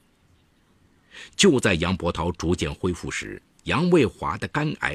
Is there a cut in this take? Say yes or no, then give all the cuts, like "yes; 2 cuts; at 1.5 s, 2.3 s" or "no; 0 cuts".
no; 0 cuts